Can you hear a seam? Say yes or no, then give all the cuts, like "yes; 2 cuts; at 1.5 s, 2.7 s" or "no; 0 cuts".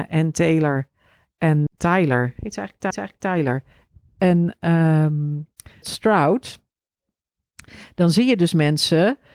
yes; 3 cuts; at 1.7 s, 2.9 s, 5.8 s